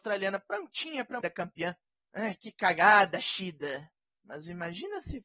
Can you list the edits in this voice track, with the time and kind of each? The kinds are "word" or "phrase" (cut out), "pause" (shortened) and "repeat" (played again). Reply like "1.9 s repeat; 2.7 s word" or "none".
1.2 s phrase; 1.9 s pause